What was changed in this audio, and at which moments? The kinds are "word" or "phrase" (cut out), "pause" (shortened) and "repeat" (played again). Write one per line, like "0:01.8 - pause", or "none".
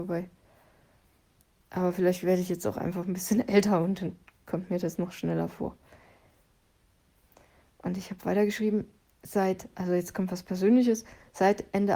none